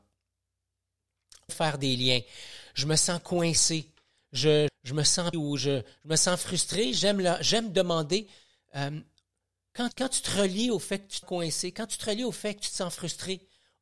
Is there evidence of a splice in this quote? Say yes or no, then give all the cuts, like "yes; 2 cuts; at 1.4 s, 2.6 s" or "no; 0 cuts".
yes; 5 cuts; at 1.5 s, 4.7 s, 5.3 s, 9.9 s, 11.2 s